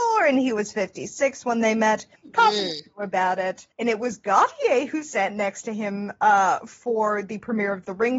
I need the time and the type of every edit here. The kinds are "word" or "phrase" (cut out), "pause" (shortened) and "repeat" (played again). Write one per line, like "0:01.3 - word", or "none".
0:02.2 - pause
0:03.7 - pause